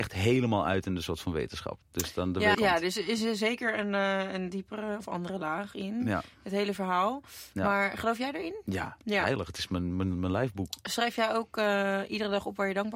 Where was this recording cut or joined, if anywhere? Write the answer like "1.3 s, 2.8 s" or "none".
1.8 s, 2.5 s